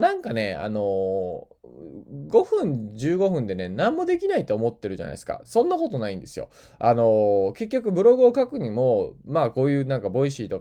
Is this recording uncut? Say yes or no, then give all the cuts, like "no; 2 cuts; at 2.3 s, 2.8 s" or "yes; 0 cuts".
yes; 0 cuts